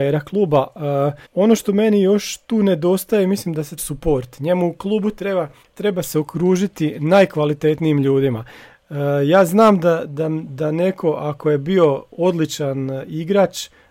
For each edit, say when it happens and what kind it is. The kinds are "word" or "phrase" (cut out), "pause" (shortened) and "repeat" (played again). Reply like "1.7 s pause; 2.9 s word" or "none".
1.2 s pause; 3.8 s phrase; 5.6 s pause